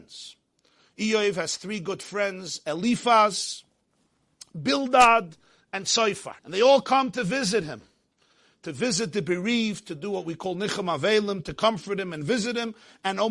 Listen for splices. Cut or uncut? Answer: cut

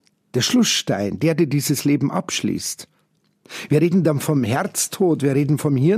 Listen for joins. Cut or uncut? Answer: uncut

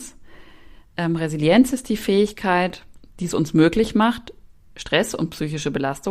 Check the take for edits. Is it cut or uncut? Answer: uncut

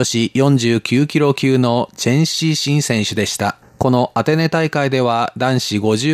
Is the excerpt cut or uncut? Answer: cut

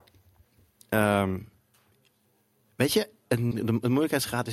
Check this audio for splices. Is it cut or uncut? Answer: cut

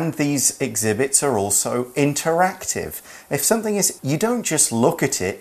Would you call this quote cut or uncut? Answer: cut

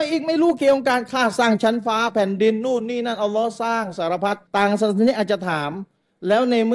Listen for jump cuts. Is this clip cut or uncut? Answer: cut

